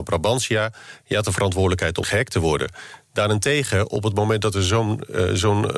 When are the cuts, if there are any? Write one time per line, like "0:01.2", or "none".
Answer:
0:02.0